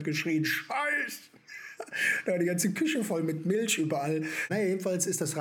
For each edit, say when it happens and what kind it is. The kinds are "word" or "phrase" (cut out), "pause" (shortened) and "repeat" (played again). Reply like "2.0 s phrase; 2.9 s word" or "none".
none